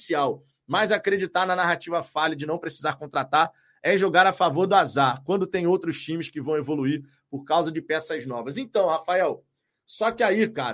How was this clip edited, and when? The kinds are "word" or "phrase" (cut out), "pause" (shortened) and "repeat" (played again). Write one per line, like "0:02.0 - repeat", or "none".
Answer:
none